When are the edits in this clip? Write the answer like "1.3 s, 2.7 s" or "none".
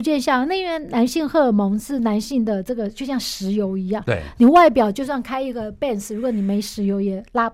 none